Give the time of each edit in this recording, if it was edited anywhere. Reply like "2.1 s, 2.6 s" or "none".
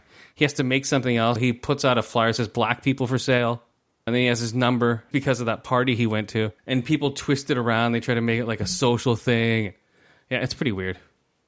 1.4 s, 4.1 s, 5.1 s, 6.6 s